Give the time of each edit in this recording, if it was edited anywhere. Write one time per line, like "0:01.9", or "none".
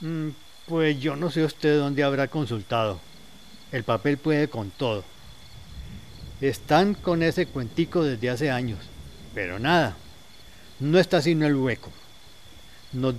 none